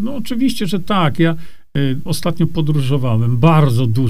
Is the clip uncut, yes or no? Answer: no